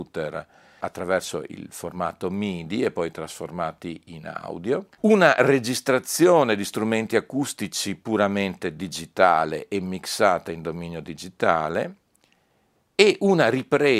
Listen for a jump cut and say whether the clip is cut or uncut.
cut